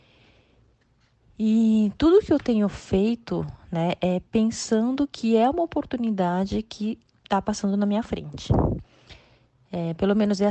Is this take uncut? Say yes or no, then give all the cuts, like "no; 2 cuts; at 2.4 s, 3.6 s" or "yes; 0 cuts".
yes; 0 cuts